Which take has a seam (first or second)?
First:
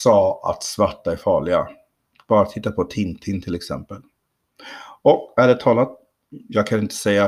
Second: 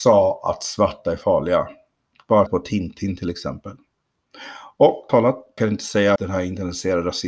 second